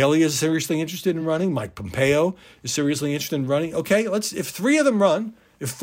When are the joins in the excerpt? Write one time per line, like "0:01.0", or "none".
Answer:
none